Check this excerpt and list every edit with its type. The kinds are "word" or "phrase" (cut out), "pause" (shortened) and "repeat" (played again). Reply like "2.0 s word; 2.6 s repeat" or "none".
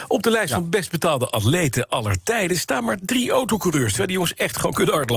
none